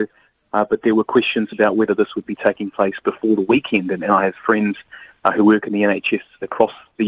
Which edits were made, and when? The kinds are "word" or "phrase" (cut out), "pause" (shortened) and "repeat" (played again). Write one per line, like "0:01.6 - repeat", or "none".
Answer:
none